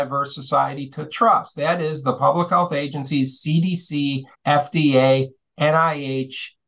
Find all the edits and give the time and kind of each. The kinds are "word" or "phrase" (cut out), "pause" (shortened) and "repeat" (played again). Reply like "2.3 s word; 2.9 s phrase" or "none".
4.3 s pause